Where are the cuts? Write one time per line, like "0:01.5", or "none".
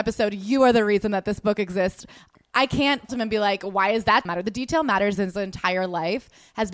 0:03.1
0:04.2
0:05.1